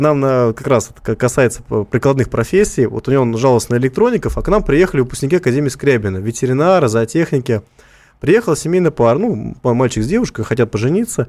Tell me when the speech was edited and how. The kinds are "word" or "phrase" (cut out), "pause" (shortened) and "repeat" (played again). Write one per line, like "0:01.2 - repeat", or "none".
none